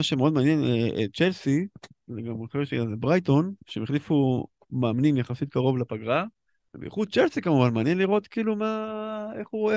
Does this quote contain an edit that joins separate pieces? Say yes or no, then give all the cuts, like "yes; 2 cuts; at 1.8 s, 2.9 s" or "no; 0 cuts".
yes; 2 cuts; at 3.6 s, 6.5 s